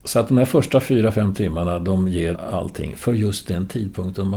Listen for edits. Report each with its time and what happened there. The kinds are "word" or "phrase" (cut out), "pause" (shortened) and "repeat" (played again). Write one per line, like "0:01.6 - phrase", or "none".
0:02.3 - word

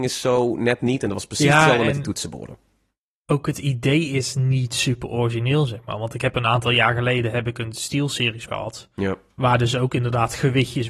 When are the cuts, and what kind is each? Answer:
0:08.5 - word

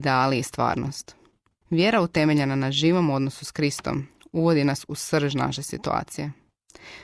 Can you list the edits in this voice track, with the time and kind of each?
none

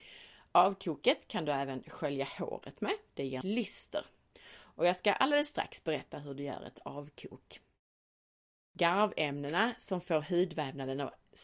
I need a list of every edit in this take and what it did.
0:03.4 - phrase

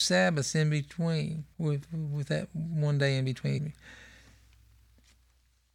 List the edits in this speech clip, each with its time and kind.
0:01.5 - pause
0:03.6 - word

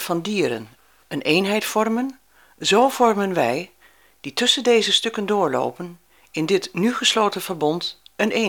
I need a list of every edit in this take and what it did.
none

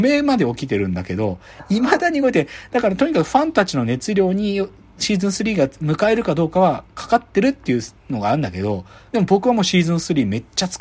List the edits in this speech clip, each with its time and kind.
none

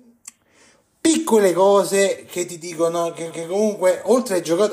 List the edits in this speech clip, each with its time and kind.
0:03.3 - repeat

